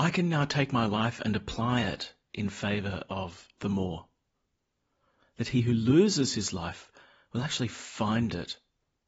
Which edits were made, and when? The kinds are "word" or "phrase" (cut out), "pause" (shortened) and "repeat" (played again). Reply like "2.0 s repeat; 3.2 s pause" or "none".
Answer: none